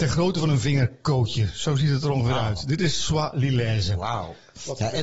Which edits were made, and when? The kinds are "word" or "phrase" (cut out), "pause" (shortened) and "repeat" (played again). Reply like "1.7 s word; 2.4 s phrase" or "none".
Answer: none